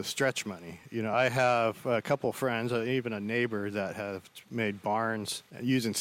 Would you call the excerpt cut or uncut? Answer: uncut